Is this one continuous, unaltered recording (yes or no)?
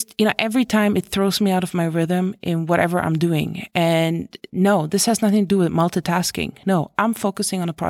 yes